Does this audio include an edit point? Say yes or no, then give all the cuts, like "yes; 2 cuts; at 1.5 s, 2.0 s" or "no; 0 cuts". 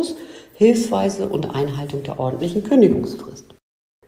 no; 0 cuts